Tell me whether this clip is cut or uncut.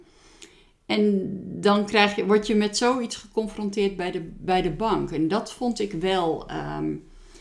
uncut